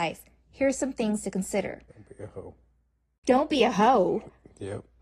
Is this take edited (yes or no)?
yes